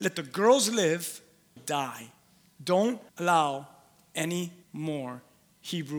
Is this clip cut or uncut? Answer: cut